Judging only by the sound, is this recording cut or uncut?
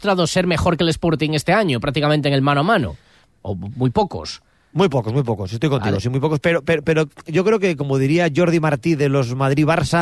uncut